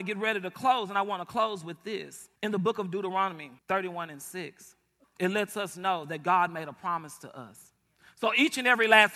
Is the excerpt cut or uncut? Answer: cut